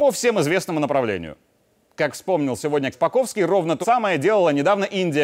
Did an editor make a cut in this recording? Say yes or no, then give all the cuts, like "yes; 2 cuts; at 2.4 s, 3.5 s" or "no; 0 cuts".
yes; 2 cuts; at 2.9 s, 3.8 s